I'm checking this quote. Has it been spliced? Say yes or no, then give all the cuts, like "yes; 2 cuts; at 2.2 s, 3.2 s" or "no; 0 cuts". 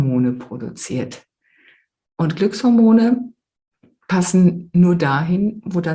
no; 0 cuts